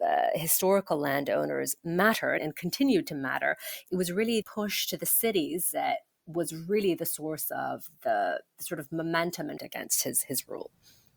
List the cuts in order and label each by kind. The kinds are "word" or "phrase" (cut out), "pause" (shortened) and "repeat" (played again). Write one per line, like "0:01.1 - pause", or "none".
0:02.4 - word
0:04.4 - word
0:09.6 - word